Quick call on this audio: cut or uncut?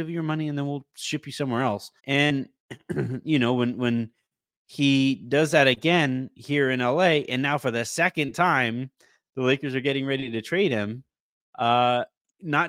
cut